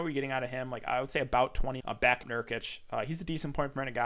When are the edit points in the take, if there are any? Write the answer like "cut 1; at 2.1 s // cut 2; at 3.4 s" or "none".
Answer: cut 1; at 1.8 s // cut 2; at 2.2 s